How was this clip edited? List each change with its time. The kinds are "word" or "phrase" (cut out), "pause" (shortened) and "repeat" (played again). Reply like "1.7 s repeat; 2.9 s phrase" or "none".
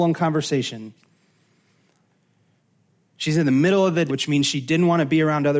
4.1 s word